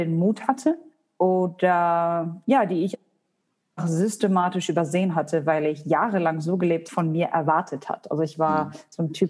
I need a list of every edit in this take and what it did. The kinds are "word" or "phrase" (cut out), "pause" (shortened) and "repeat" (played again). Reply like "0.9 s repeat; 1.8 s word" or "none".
6.9 s phrase